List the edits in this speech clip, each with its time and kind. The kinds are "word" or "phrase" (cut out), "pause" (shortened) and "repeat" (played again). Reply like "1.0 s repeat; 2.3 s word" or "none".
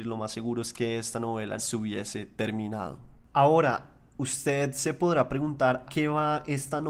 1.6 s word; 5.9 s word